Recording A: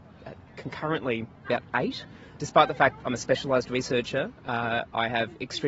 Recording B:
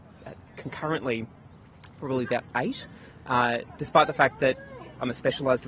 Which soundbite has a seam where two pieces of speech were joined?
A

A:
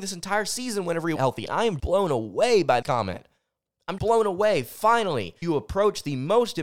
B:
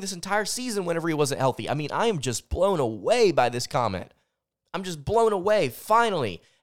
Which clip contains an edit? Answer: A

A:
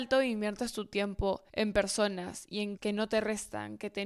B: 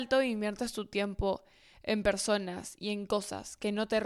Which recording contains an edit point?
A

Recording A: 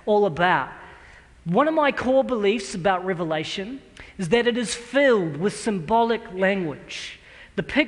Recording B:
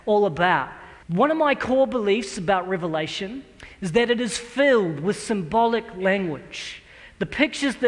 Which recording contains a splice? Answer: B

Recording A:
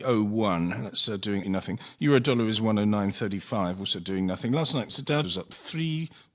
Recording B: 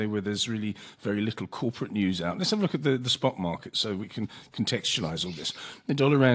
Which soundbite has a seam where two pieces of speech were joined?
A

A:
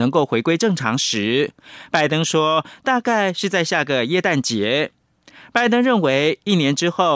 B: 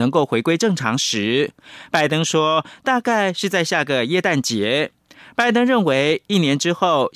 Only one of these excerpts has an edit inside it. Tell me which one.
B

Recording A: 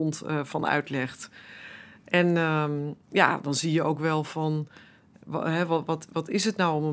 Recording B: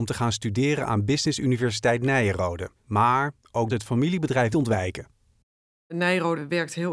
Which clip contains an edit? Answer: B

